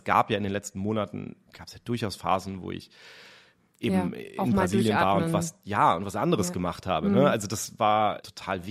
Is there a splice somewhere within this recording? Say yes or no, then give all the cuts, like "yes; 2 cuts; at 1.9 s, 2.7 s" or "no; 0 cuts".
no; 0 cuts